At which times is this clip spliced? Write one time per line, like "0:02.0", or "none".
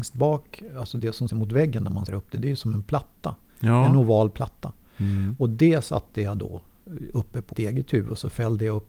0:01.3
0:02.1
0:07.5